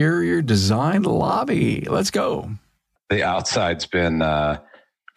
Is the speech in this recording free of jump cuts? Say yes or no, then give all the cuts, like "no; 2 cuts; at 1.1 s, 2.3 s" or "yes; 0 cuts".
yes; 0 cuts